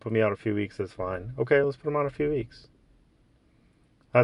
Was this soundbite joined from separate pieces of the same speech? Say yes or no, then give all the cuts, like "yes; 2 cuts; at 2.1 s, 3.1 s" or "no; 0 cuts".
no; 0 cuts